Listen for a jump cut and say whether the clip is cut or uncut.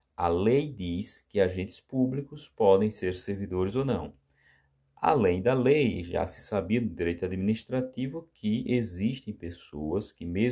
uncut